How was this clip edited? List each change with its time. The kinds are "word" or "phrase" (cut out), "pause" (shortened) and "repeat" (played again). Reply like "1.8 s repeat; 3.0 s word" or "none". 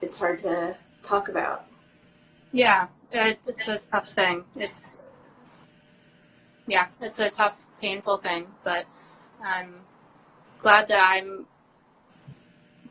none